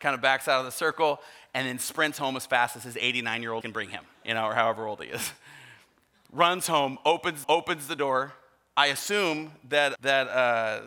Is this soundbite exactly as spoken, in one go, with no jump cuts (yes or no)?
no